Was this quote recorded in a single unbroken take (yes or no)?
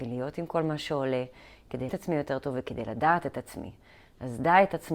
no